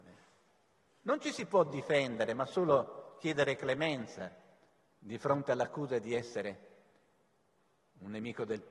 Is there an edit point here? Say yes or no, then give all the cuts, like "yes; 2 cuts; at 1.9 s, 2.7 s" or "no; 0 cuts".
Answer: no; 0 cuts